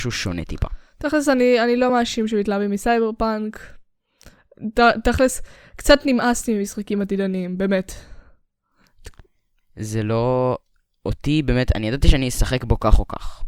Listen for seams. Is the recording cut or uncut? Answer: uncut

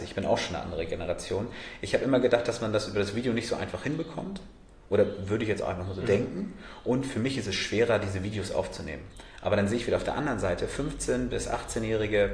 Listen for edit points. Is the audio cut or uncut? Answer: uncut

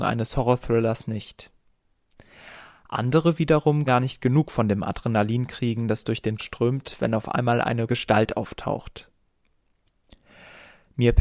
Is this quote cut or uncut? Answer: cut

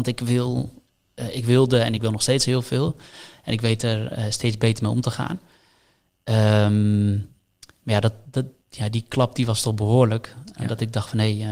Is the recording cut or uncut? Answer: uncut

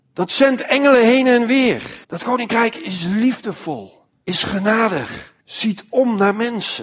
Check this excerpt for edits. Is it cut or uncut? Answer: cut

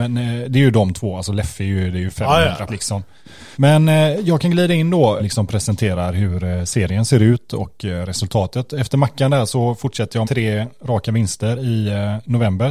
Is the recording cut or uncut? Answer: cut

